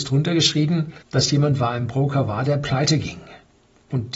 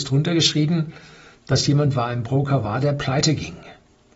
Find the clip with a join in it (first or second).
first